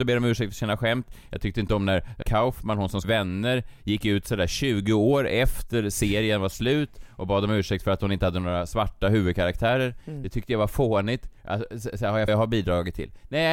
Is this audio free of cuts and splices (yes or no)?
no